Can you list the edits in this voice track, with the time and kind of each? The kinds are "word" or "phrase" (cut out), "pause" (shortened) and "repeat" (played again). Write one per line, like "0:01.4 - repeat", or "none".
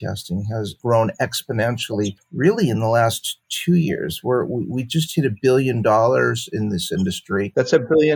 none